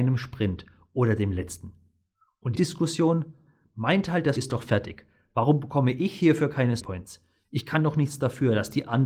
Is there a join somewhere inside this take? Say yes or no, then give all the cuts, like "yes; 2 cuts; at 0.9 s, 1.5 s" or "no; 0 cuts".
yes; 3 cuts; at 2.5 s, 4.4 s, 6.8 s